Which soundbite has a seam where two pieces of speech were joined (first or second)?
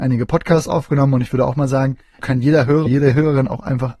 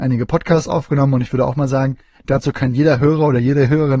first